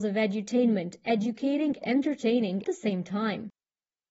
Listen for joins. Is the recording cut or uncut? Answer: cut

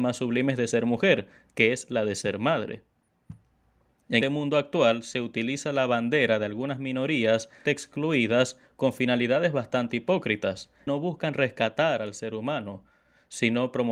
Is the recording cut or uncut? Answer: cut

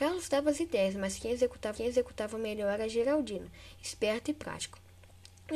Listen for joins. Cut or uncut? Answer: cut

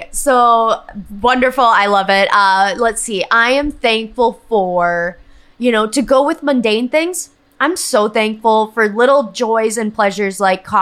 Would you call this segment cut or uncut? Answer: uncut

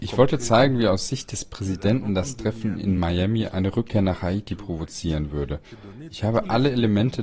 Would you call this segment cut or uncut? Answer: uncut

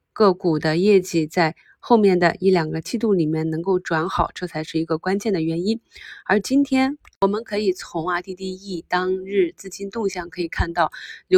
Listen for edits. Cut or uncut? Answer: uncut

